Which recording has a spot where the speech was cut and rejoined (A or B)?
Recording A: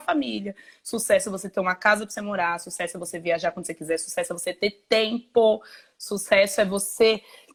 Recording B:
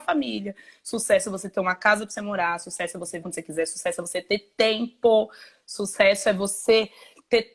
B